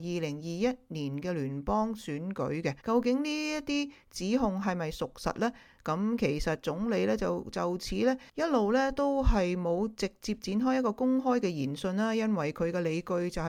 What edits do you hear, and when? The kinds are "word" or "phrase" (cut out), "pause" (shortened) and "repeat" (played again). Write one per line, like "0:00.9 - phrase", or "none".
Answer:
0:02.8 - pause
0:08.3 - pause